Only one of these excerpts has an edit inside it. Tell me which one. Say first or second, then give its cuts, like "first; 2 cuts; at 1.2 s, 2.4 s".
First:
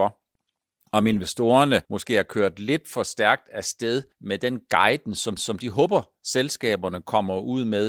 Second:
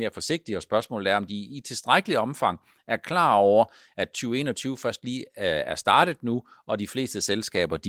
first; 3 cuts; at 1.8 s, 4.1 s, 5.4 s